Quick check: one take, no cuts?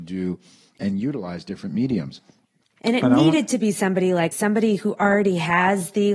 no; 1 cut; at 4.3 s

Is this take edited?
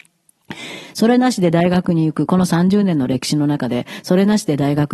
no; 0 cuts

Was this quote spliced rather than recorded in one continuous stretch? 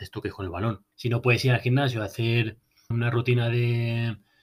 yes; 2 cuts; at 0.9 s, 2.9 s

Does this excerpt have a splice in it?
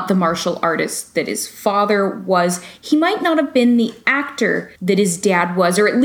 yes; 1 cut; at 4.8 s

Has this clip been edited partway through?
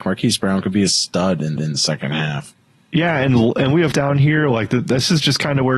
yes; 3 cuts; at 1.6 s, 2.6 s, 3.9 s

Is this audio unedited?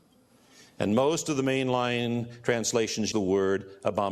no; 1 cut; at 3.1 s

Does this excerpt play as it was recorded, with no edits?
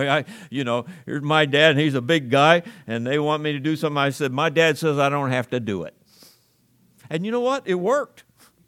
yes; 0 cuts

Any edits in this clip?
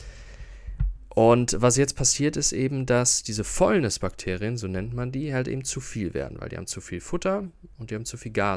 no; 0 cuts

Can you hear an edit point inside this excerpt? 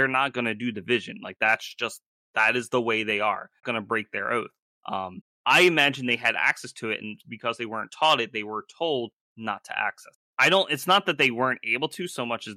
yes; 1 cut; at 3.6 s

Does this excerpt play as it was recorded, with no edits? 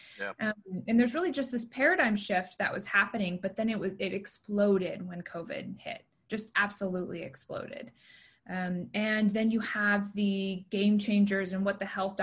yes; 0 cuts

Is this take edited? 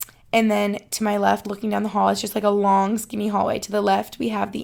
yes; 1 cut; at 1.4 s

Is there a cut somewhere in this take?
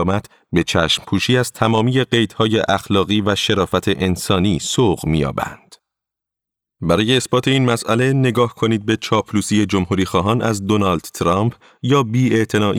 no; 0 cuts

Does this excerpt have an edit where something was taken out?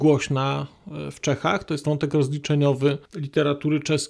yes; 2 cuts; at 1.8 s, 3.0 s

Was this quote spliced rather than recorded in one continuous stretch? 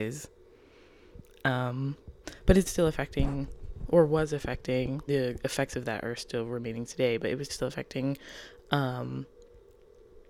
yes; 3 cuts; at 2.6 s, 5.1 s, 7.5 s

